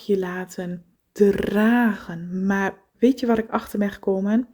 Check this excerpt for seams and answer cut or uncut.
cut